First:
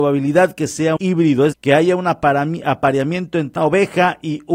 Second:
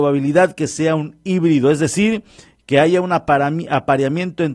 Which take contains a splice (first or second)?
first